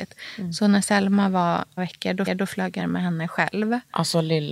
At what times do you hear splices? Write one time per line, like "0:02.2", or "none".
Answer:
0:01.8
0:02.3
0:02.8